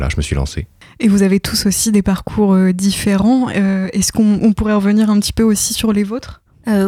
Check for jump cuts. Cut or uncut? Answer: uncut